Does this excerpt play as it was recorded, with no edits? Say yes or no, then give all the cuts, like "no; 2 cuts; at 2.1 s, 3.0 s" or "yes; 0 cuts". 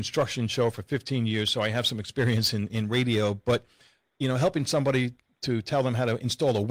no; 1 cut; at 2.7 s